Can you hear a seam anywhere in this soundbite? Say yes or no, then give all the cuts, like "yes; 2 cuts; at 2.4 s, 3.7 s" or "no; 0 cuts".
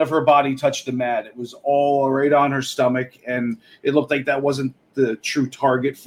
no; 0 cuts